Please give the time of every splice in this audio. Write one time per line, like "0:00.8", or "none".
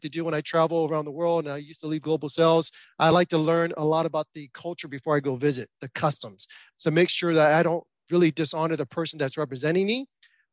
none